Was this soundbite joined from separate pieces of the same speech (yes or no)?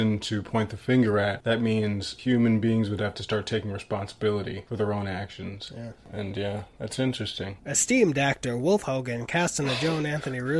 no